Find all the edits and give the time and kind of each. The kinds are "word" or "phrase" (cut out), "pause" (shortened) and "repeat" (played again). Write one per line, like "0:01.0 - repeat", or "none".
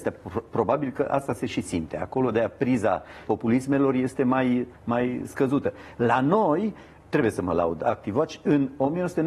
0:03.3 - word
0:04.7 - pause
0:07.0 - phrase